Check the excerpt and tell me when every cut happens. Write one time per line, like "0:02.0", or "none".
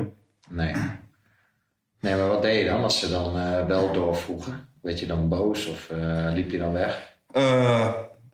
none